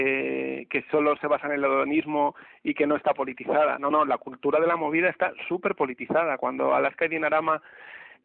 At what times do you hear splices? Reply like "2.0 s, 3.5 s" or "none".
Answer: none